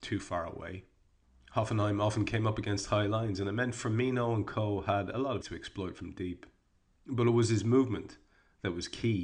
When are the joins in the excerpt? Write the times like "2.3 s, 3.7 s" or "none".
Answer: 5.4 s